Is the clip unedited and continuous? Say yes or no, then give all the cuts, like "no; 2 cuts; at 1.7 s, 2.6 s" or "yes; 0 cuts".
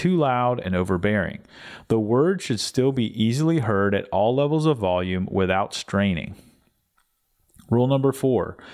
yes; 0 cuts